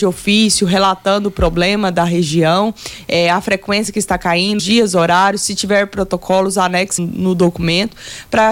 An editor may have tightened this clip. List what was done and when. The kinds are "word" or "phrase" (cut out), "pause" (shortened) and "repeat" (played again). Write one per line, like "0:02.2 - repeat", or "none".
0:04.6 - word
0:07.0 - word